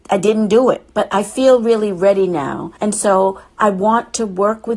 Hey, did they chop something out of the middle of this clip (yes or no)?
yes